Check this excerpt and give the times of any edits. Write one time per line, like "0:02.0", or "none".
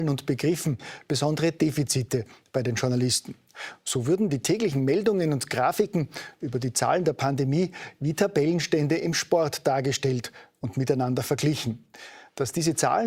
none